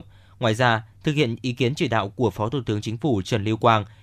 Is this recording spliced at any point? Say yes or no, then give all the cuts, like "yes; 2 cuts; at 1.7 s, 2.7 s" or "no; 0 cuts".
no; 0 cuts